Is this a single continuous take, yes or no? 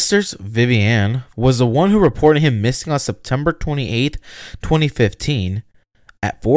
no